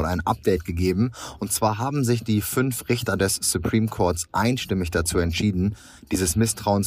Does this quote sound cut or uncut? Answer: uncut